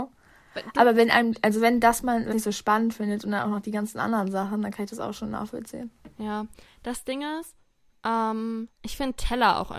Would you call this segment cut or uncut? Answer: cut